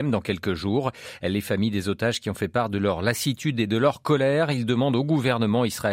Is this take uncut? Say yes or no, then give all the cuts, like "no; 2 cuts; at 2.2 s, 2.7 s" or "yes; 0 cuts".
yes; 0 cuts